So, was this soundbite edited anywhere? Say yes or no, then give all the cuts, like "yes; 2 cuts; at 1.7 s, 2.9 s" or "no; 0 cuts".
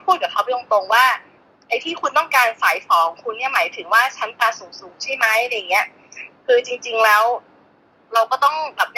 no; 0 cuts